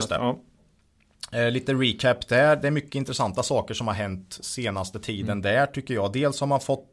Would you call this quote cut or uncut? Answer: uncut